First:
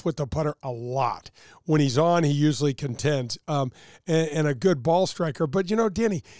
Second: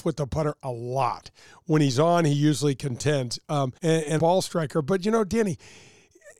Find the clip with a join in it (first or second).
second